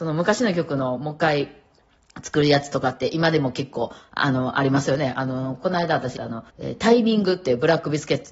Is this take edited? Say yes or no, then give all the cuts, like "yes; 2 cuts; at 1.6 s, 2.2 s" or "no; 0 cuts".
yes; 2 cuts; at 6.2 s, 6.5 s